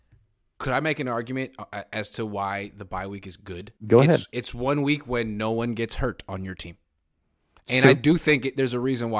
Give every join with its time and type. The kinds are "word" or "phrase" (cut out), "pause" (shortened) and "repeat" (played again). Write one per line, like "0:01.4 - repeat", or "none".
0:03.8 - pause